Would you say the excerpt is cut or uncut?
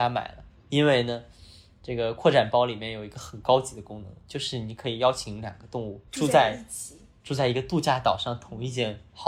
cut